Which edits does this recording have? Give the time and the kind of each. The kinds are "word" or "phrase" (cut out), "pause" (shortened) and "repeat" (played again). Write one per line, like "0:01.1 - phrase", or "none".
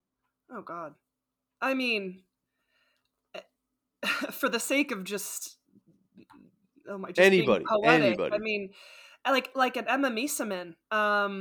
none